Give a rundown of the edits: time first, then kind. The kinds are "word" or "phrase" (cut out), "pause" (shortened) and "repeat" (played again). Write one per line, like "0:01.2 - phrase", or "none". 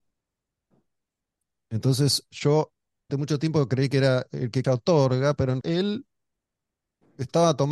0:03.1 - word
0:04.6 - word
0:05.6 - word